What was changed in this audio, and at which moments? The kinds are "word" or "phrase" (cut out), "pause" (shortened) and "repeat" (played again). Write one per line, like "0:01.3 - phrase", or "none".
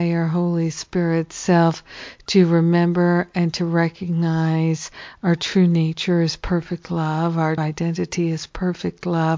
0:07.6 - word